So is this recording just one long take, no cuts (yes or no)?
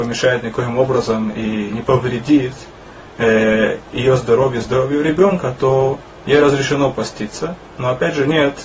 yes